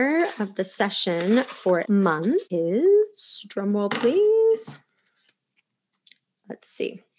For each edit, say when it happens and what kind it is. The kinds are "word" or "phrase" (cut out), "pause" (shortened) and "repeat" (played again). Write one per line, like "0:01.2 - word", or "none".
0:01.8 - word
0:02.5 - pause